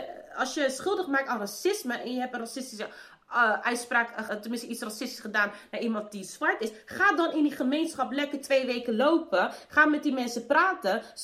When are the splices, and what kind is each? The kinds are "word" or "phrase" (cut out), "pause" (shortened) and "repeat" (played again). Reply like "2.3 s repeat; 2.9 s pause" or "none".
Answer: 4.3 s word